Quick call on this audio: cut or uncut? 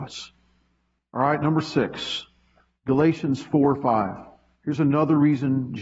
uncut